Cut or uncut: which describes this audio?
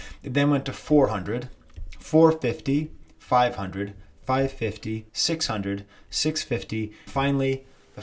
cut